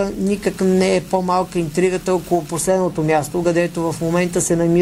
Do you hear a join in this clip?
no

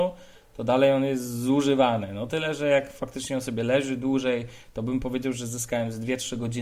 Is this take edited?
no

